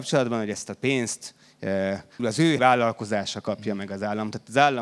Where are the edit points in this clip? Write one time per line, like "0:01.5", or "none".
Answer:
0:02.2
0:02.6